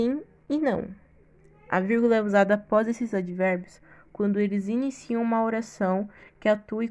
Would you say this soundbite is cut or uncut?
uncut